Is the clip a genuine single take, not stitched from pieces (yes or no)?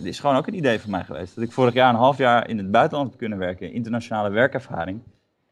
yes